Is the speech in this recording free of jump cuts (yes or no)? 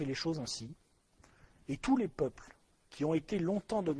yes